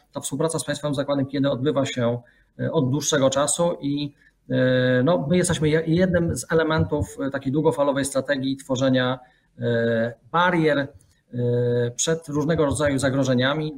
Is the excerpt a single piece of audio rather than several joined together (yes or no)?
yes